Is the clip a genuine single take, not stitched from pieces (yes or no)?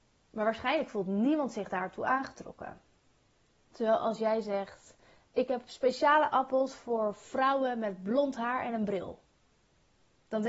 yes